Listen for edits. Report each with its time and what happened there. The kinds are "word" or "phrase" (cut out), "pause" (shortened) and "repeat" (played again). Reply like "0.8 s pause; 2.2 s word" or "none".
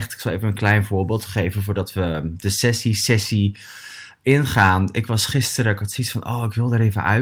none